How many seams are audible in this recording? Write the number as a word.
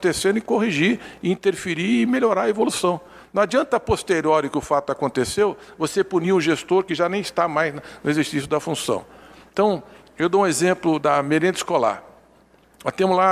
zero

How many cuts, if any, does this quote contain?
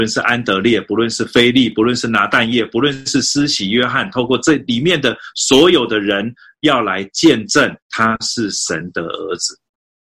one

